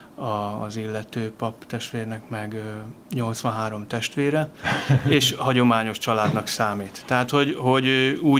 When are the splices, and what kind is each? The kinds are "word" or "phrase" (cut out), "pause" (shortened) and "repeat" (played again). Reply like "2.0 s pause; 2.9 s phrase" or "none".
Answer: none